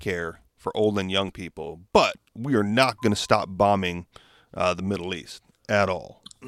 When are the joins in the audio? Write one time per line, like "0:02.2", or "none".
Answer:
none